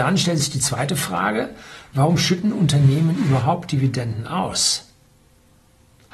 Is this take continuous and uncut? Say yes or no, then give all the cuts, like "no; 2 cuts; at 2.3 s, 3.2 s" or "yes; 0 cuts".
yes; 0 cuts